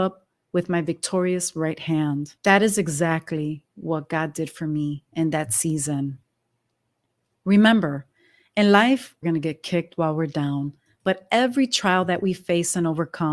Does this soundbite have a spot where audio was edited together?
yes; 2 cuts; at 2.4 s, 9.2 s

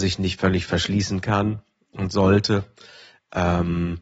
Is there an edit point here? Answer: no; 0 cuts

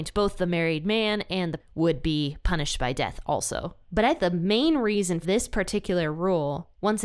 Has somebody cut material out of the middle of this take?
yes; 3 cuts; at 1.6 s, 4.2 s, 5.2 s

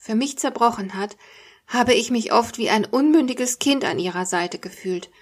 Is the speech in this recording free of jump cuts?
yes; 0 cuts

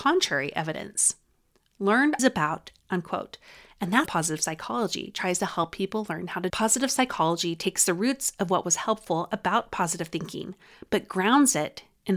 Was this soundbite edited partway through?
yes; 4 cuts; at 2.2 s, 2.8 s, 4.1 s, 6.5 s

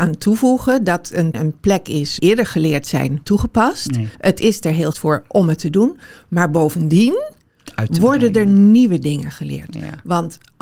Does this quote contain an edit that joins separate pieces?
yes; 5 cuts; at 1.3 s, 2.2 s, 3.2 s, 4.1 s, 4.9 s

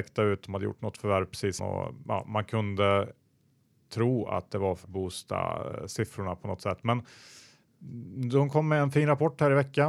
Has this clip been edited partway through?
yes; 2 cuts; at 1.6 s, 4.8 s

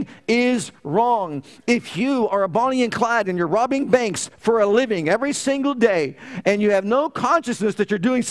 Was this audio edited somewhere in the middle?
no; 0 cuts

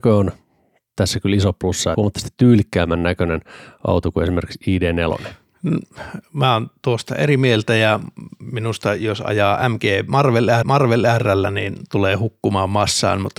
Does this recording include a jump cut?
yes; 2 cuts; at 1.9 s, 10.6 s

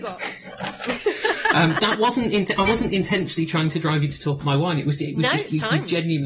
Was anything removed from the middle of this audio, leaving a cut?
yes; 2 cuts; at 1.8 s, 4.4 s

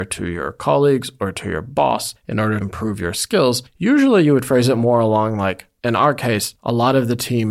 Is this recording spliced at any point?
yes; 1 cut; at 2.6 s

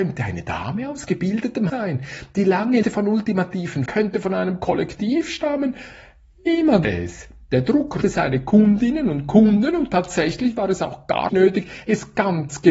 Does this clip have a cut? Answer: yes; 6 cuts; at 1.7 s, 2.8 s, 3.9 s, 6.8 s, 8.0 s, 11.3 s

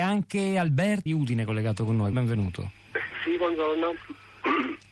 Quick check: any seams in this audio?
yes; 2 cuts; at 1.1 s, 2.1 s

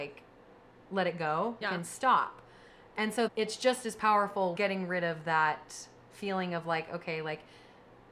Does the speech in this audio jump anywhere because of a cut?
yes; 3 cuts; at 1.6 s, 3.3 s, 4.6 s

